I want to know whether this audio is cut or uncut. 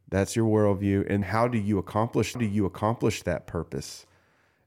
cut